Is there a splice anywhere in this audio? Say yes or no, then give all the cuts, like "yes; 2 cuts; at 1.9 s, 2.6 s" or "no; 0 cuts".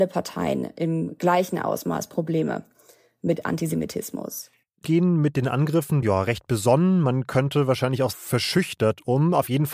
yes; 3 cuts; at 4.8 s, 6.0 s, 8.1 s